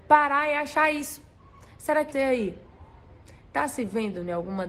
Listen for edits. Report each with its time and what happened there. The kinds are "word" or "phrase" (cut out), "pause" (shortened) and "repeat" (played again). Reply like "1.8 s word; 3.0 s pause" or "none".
2.1 s word

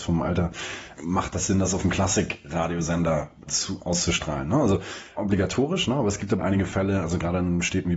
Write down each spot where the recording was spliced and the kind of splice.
1.0 s word; 3.5 s word; 5.2 s word; 6.4 s word

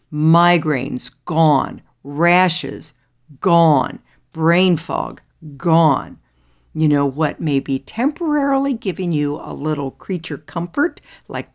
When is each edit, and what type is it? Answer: none

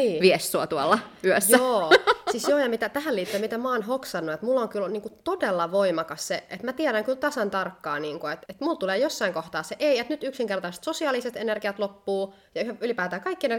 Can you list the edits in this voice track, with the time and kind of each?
8.5 s word

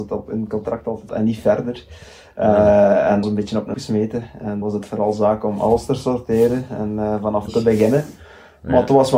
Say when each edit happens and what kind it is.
1.1 s word; 3.2 s word; 3.7 s word; 4.6 s word; 7.5 s word

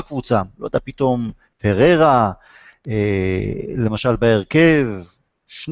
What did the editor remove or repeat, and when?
none

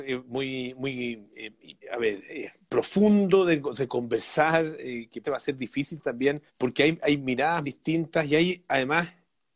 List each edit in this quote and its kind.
1.8 s pause; 5.2 s word; 6.5 s pause; 7.6 s word

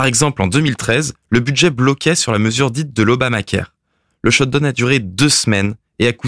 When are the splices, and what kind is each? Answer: none

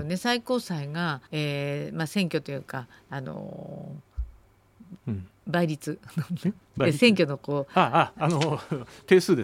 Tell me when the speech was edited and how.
1.3 s pause

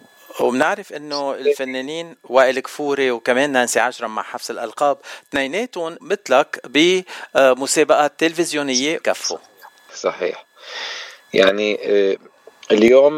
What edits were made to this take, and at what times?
6.0 s word; 9.0 s word; 9.9 s word

